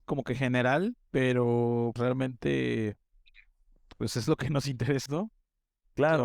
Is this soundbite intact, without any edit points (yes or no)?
no